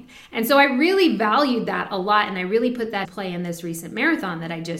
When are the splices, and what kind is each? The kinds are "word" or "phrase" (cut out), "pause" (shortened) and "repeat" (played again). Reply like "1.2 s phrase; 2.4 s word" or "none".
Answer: 3.0 s word